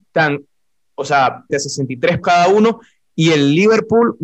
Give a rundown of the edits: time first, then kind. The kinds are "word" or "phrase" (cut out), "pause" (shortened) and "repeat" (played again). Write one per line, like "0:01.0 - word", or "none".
0:01.5 - word
0:02.2 - word